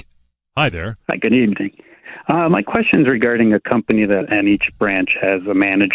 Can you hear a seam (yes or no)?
yes